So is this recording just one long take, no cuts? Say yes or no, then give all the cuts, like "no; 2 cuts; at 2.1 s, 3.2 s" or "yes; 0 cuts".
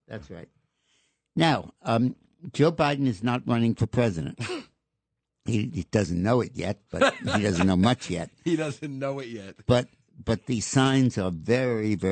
yes; 0 cuts